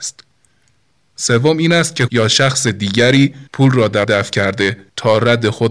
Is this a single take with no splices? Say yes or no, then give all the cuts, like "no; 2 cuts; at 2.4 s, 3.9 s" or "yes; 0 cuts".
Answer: no; 3 cuts; at 2.1 s, 3.5 s, 4.0 s